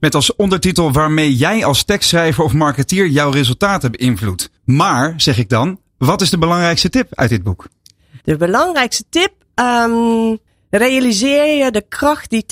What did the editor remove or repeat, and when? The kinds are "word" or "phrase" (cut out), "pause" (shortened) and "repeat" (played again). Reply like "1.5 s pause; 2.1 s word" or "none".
4.6 s pause; 8.2 s pause; 10.5 s pause